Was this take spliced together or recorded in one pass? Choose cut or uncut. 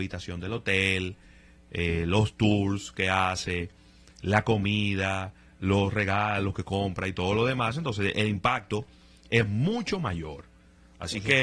uncut